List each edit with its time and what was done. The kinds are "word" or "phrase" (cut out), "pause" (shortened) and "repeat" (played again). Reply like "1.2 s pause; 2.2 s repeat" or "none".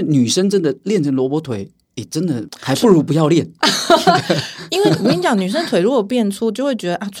none